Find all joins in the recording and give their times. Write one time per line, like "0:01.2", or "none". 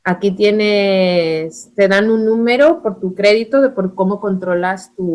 none